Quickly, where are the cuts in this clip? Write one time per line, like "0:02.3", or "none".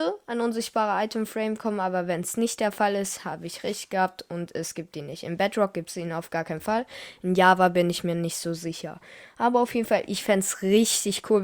none